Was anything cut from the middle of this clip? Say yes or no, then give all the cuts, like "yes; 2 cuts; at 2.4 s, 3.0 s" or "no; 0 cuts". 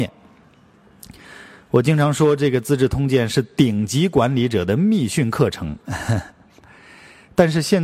no; 0 cuts